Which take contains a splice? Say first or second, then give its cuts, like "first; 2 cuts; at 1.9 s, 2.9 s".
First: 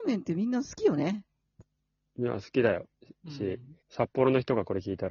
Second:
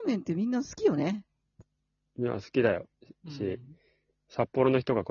first; 1 cut; at 3.8 s